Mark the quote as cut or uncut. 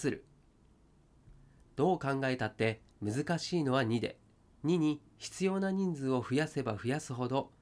cut